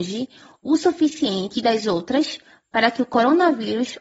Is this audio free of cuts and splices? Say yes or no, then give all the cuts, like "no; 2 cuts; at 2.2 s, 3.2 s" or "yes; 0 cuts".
yes; 0 cuts